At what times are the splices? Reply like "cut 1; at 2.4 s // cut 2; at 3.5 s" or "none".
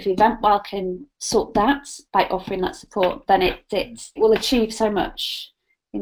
cut 1; at 1.1 s // cut 2; at 2.1 s // cut 3; at 4.2 s